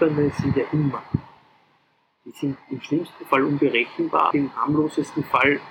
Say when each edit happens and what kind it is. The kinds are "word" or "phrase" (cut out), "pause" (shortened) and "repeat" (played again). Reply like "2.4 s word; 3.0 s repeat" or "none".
4.3 s word